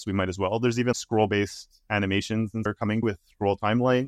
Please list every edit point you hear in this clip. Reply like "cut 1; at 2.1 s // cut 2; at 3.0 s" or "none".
cut 1; at 0.9 s // cut 2; at 2.7 s // cut 3; at 3.0 s